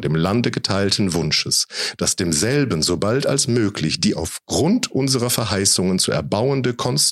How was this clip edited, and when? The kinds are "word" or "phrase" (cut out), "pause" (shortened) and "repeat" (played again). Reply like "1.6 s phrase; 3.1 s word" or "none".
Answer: none